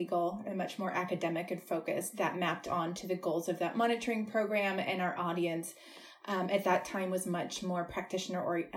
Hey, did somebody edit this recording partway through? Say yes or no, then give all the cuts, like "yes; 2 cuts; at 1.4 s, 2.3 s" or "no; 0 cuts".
no; 0 cuts